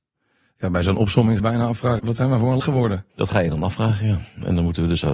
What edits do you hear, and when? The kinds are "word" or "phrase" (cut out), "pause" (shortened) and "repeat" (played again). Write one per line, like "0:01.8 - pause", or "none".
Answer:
0:01.4 - phrase
0:02.0 - word
0:02.6 - word
0:03.1 - pause